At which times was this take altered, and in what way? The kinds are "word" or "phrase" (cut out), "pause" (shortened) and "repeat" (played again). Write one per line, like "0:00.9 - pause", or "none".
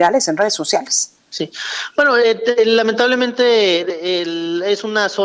0:01.2 - pause